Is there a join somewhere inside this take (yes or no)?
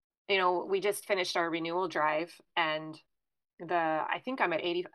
no